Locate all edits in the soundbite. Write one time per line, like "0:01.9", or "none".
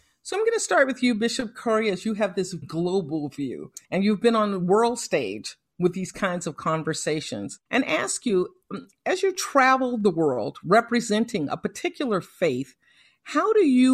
0:02.6
0:03.8
0:07.7